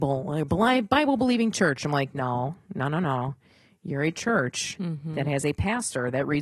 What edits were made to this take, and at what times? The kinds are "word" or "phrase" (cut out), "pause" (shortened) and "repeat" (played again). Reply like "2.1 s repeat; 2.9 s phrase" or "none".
none